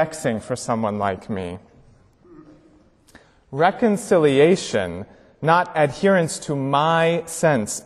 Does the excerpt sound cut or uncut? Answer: uncut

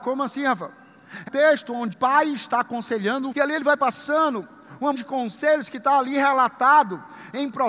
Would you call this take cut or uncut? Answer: cut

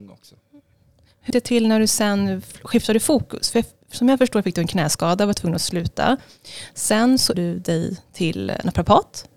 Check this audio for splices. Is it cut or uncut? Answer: cut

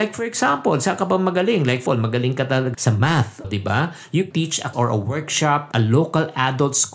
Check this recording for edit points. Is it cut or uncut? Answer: cut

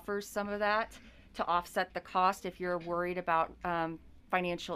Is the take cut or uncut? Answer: uncut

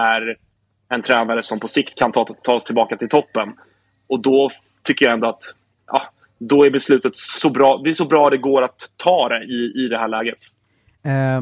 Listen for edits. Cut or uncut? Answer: uncut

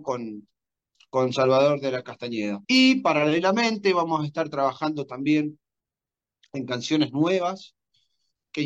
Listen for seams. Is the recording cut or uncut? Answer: cut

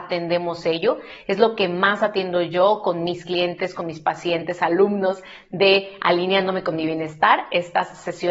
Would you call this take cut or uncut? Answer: uncut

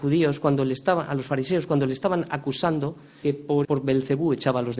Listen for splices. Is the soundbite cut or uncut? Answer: cut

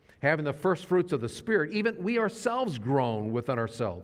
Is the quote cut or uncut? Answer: uncut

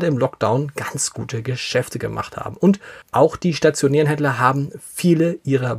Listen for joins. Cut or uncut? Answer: cut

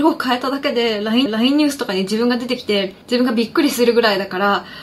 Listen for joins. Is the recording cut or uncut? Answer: cut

